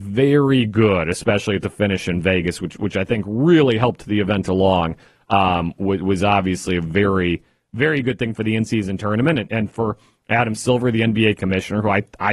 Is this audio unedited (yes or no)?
yes